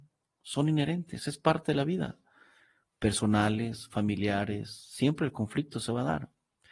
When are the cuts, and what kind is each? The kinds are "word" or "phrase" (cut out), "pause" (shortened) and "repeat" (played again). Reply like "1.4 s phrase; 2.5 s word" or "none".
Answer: none

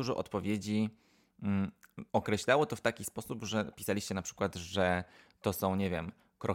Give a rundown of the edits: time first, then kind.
2.1 s pause

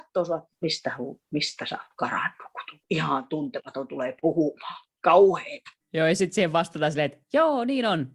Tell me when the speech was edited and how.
7.2 s pause

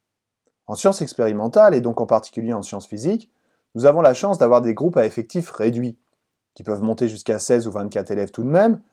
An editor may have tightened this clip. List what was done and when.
none

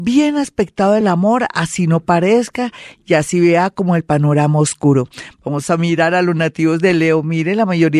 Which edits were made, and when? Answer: none

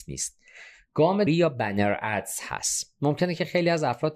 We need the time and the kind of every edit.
1.3 s phrase

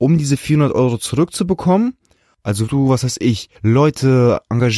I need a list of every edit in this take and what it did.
2.7 s word; 3.5 s pause

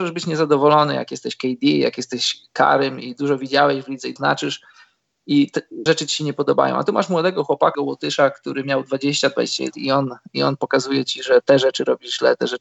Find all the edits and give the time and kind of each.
4.2 s word; 5.9 s word; 7.7 s word; 9.7 s word

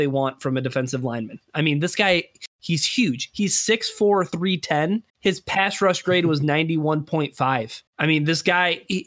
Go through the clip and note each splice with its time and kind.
5.1 s pause; 7.9 s pause

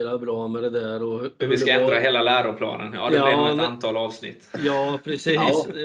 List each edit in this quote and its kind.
none

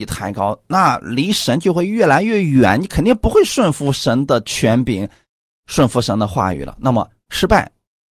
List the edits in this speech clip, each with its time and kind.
none

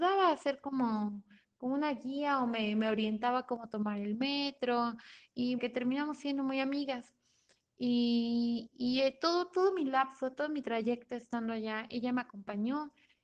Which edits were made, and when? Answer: 5.6 s phrase

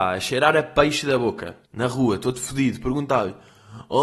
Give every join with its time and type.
1.6 s pause

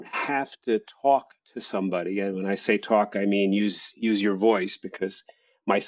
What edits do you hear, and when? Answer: none

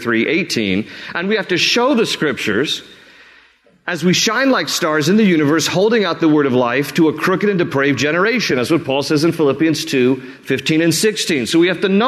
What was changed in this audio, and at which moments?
none

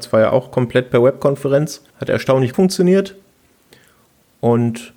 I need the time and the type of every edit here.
1.9 s pause; 2.5 s word

